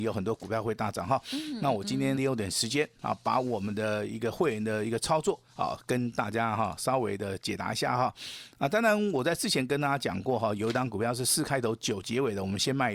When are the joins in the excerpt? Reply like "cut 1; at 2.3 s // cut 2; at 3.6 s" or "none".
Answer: cut 1; at 2.2 s // cut 2; at 5.5 s